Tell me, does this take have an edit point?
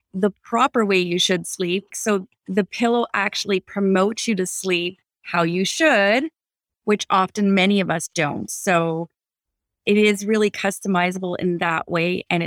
yes; 1 cut; at 1.9 s

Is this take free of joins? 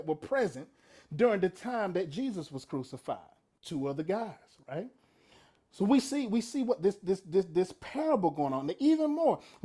yes; 0 cuts

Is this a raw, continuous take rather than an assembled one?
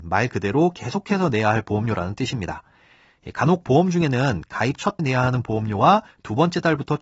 no; 1 cut; at 5.0 s

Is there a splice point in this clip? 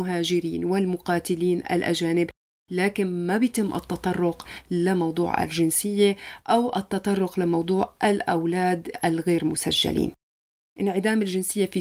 no; 0 cuts

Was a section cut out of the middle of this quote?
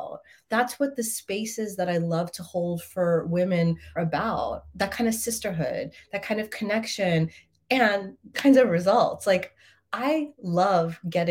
yes; 2 cuts; at 4.0 s, 8.3 s

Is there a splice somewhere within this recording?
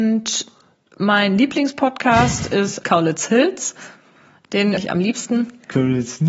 yes; 2 cuts; at 2.8 s, 4.8 s

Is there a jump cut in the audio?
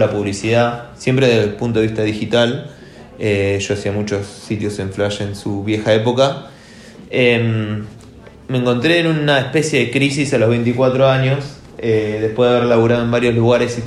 no; 0 cuts

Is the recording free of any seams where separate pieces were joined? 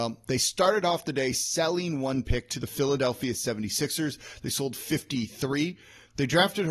yes; 0 cuts

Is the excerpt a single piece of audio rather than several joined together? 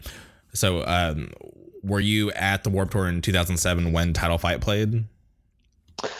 yes; 0 cuts

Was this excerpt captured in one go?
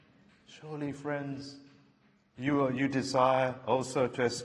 yes; 0 cuts

